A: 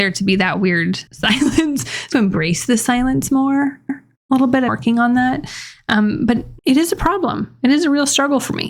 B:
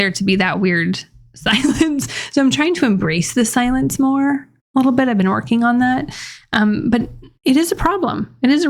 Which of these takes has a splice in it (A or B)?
A